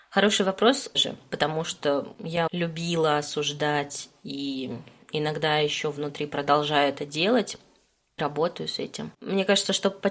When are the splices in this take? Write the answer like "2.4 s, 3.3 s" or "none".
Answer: 0.9 s, 2.5 s, 8.2 s